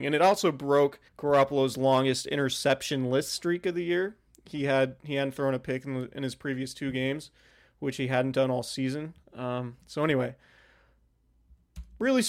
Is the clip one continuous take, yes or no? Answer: no